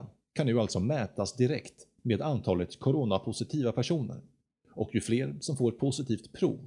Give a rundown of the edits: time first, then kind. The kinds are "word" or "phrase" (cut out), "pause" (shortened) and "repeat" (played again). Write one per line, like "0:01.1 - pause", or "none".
none